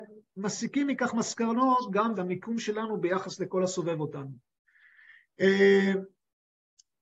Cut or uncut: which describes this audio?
cut